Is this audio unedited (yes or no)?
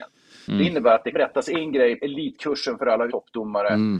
no